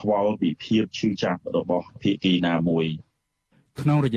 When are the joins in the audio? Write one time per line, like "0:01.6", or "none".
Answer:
none

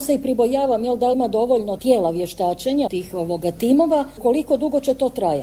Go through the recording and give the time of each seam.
0:01.1
0:01.8
0:02.9

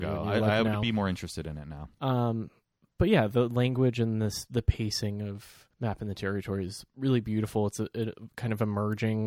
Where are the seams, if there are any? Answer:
0:01.9
0:05.7

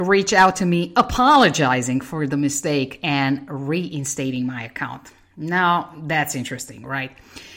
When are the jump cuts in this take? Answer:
none

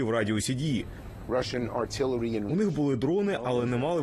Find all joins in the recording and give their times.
0:02.5

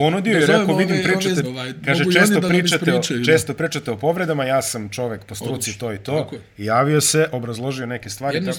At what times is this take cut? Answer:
0:01.4

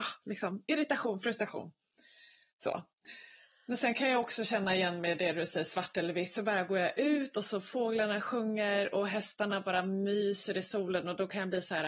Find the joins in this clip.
none

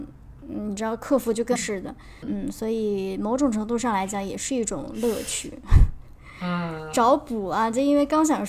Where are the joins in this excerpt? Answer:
0:01.6
0:02.2

